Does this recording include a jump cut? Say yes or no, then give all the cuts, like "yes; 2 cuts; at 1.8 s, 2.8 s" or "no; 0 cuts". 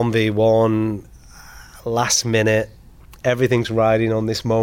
no; 0 cuts